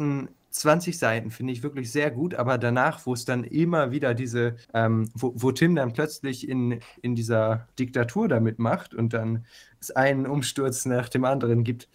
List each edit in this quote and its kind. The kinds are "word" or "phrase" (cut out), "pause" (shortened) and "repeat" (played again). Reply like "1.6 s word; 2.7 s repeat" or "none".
4.6 s pause; 7.7 s pause

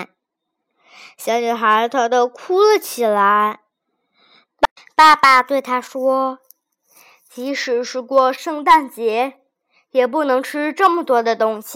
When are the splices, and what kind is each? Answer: none

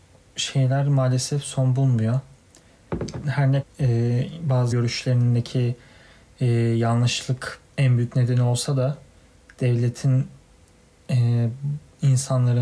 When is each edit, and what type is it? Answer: 3.6 s word; 4.7 s word; 7.6 s word

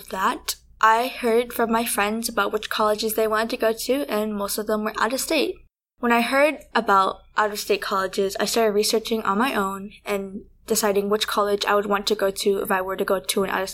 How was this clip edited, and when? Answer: none

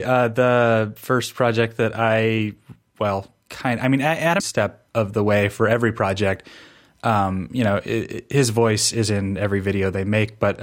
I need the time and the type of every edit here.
3.4 s pause; 4.4 s phrase; 4.9 s pause

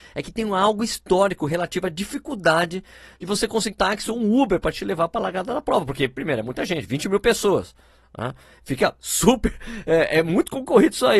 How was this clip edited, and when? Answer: 3.7 s word

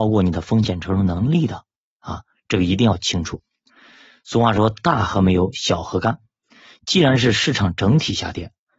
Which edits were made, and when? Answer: none

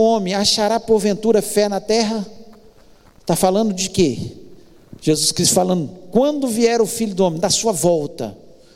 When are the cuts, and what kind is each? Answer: none

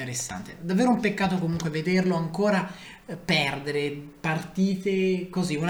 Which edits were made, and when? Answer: none

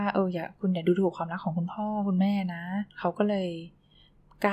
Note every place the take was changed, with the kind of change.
2.9 s pause

